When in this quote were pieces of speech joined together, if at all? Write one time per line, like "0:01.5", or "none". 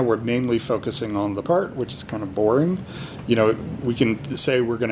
0:01.4